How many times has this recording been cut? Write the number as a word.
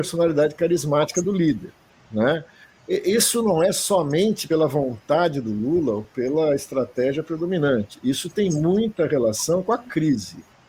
zero